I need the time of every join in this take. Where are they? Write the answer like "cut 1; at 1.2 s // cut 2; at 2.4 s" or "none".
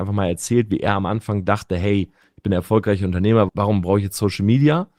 cut 1; at 3.5 s